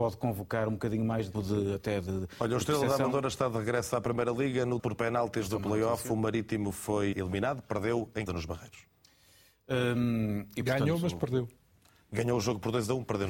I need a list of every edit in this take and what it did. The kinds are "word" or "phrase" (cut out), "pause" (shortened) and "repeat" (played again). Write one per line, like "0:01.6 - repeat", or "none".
0:01.3 - word
0:04.8 - word
0:07.1 - word
0:08.3 - word